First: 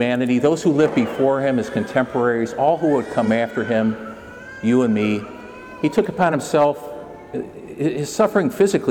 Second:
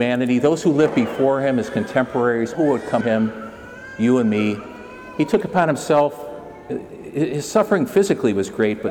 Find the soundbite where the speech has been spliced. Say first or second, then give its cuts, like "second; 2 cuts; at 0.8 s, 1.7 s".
second; 2 cuts; at 2.5 s, 3.0 s